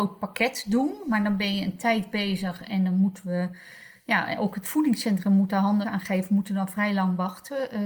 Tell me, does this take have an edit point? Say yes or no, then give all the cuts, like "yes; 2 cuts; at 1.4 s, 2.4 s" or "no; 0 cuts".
yes; 1 cut; at 5.8 s